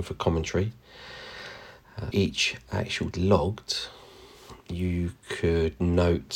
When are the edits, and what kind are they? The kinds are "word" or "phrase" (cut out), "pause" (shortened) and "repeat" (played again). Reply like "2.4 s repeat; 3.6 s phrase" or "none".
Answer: 2.1 s word; 3.1 s word